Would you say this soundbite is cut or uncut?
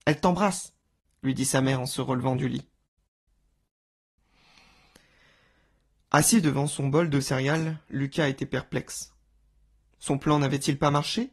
uncut